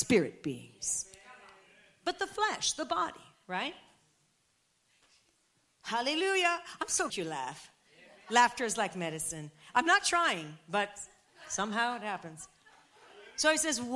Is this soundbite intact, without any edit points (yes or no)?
no